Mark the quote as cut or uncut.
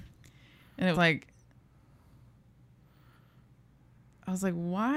cut